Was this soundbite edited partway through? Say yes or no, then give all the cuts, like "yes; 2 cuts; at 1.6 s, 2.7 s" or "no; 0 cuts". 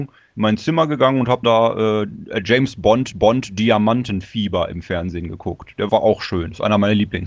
yes; 3 cuts; at 1.4 s, 3.1 s, 5.9 s